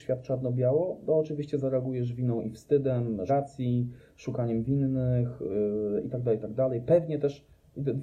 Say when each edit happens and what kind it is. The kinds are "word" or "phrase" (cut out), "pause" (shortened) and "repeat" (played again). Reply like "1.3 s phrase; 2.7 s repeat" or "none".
3.3 s word